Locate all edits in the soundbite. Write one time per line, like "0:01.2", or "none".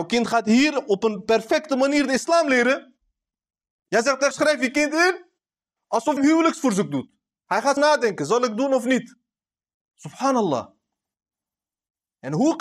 0:04.3
0:06.2
0:07.8